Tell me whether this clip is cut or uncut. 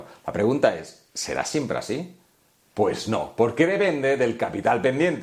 uncut